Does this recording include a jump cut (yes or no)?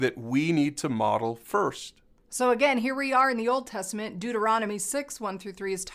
no